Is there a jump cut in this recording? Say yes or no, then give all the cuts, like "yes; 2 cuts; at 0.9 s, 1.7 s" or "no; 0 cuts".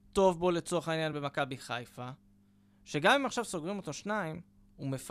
no; 0 cuts